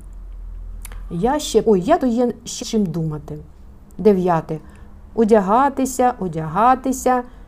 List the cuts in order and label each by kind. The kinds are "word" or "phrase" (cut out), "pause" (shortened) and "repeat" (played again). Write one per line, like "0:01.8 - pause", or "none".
0:01.6 - word
0:02.0 - word
0:02.6 - word